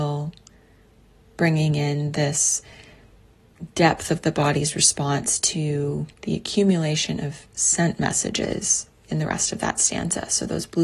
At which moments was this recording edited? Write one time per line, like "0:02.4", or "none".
0:06.1